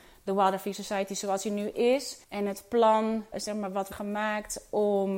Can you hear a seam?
yes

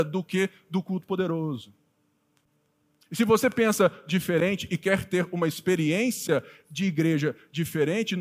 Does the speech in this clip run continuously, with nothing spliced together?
yes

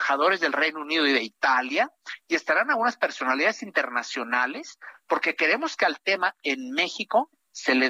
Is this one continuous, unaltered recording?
yes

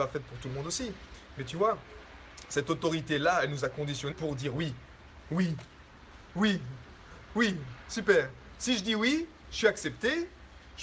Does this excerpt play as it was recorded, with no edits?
no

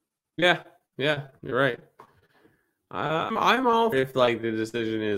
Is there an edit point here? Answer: yes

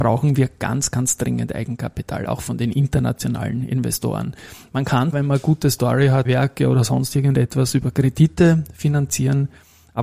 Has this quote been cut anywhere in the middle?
yes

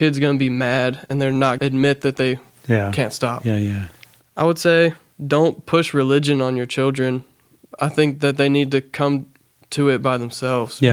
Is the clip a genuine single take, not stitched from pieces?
no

